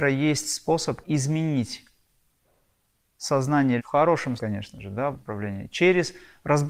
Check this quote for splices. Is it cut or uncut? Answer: cut